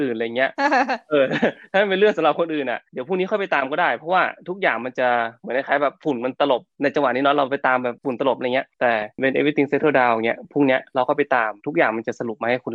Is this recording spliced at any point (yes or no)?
yes